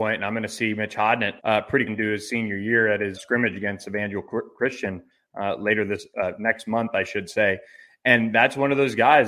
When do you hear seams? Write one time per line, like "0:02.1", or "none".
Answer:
0:01.4
0:01.9
0:03.1